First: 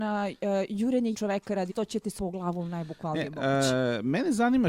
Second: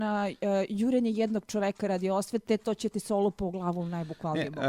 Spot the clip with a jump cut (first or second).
first